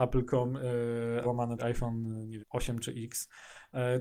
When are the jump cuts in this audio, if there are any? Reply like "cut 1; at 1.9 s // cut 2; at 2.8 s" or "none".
cut 1; at 1.2 s // cut 2; at 1.6 s // cut 3; at 2.4 s